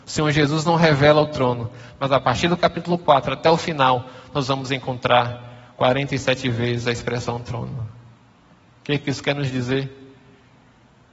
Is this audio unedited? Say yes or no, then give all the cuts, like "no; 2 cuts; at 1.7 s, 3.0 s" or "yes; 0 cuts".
yes; 0 cuts